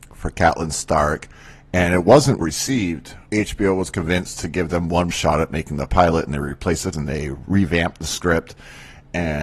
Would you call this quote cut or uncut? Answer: cut